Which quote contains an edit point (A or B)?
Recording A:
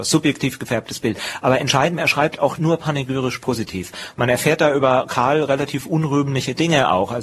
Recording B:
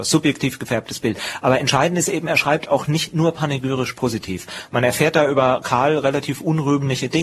A